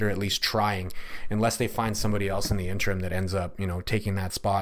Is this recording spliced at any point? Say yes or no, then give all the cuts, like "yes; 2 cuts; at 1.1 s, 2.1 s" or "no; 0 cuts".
no; 0 cuts